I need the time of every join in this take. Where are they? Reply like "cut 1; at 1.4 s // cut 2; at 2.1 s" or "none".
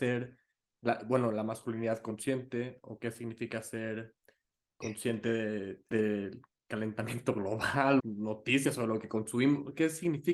cut 1; at 5.9 s // cut 2; at 8.0 s